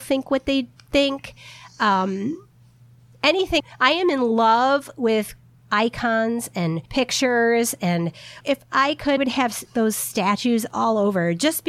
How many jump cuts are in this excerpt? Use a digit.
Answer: 6